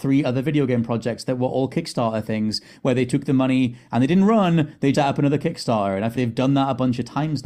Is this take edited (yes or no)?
yes